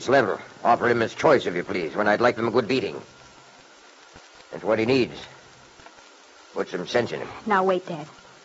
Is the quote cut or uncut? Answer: cut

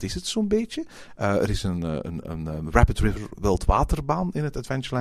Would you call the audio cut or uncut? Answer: uncut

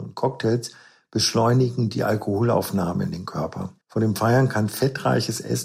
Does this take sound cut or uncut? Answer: cut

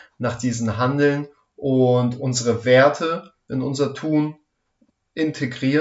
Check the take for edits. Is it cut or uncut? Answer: uncut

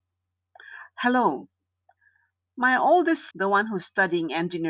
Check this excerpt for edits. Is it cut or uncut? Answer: cut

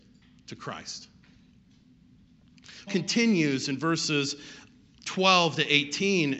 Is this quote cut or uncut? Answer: cut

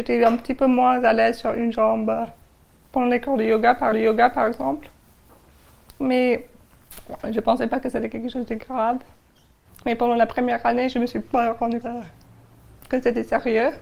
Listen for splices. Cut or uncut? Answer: cut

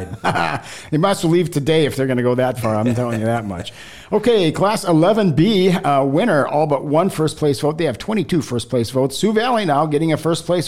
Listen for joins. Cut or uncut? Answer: uncut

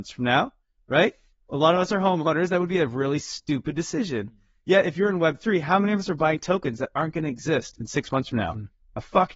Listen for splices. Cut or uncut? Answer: uncut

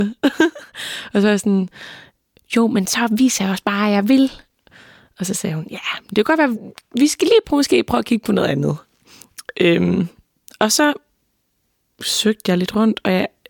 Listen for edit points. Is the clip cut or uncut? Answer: uncut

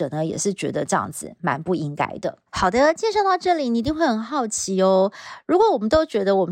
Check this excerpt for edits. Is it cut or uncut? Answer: cut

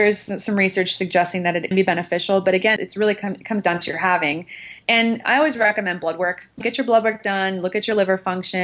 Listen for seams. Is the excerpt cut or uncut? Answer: cut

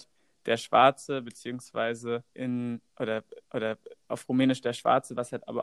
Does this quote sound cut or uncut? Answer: cut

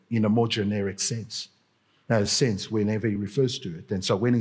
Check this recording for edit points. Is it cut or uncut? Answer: uncut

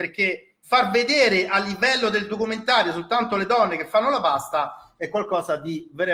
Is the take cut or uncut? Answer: uncut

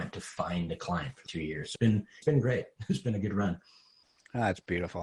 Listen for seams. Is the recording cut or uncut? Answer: cut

